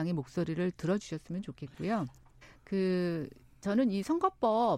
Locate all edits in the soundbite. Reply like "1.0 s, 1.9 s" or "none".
2.4 s